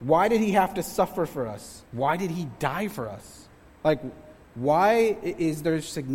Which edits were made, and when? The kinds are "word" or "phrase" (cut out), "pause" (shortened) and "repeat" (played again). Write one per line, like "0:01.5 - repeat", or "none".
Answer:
0:01.9 - pause
0:03.6 - pause

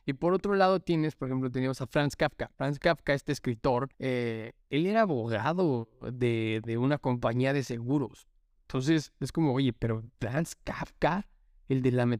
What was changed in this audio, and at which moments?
0:02.5 - pause
0:03.9 - pause
0:08.6 - pause
0:10.1 - pause

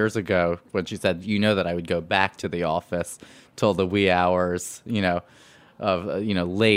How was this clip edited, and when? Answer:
none

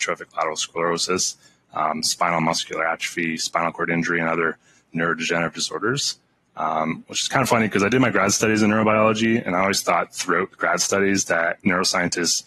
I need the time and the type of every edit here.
none

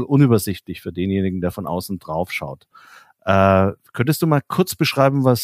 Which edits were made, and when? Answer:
none

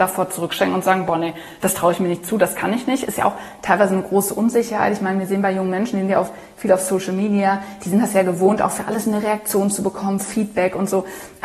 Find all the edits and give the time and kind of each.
none

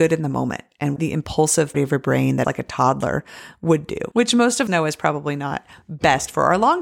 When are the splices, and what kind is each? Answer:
0:01.0 - word
0:01.7 - word
0:02.4 - word
0:04.1 - word
0:04.7 - word

